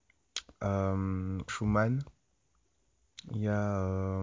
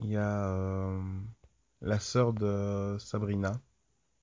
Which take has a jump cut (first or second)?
first